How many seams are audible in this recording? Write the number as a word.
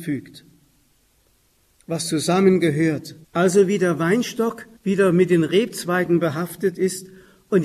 two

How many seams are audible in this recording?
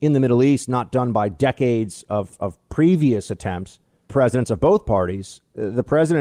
one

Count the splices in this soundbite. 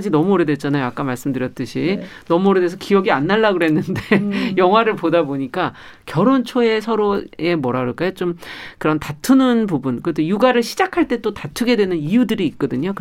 one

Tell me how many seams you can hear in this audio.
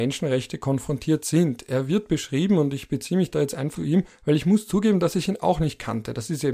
one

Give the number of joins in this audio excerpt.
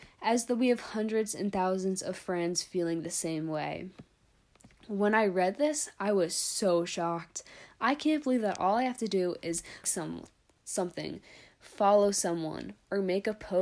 one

